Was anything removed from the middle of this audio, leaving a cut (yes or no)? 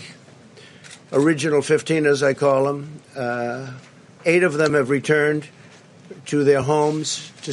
no